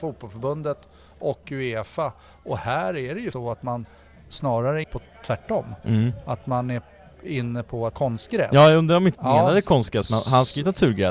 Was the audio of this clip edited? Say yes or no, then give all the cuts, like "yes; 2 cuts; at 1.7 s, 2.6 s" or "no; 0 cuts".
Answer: yes; 4 cuts; at 3.3 s, 4.8 s, 7.9 s, 9.1 s